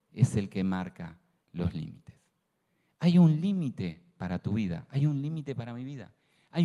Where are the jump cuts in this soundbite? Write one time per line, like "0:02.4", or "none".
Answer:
none